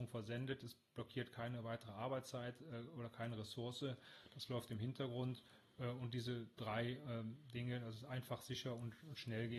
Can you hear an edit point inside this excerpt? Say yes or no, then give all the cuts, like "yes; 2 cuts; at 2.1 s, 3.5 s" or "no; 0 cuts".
no; 0 cuts